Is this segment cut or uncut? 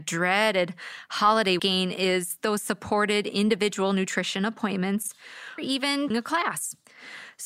cut